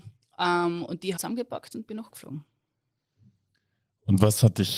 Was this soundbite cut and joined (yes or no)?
yes